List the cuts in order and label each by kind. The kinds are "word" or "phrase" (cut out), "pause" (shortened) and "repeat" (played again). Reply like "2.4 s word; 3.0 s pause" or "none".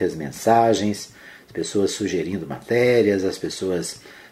none